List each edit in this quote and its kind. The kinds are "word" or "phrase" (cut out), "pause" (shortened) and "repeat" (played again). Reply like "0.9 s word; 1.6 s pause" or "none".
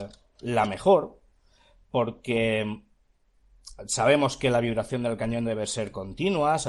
none